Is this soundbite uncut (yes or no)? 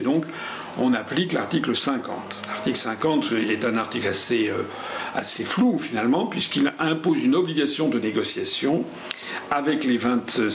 yes